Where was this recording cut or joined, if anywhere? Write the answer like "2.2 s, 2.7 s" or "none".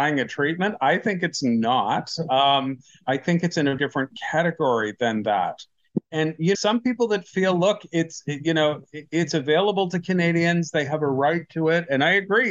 3.0 s, 3.8 s, 6.5 s